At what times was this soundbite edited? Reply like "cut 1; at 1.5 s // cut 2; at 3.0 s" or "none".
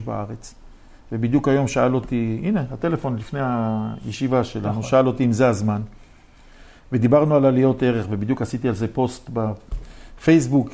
none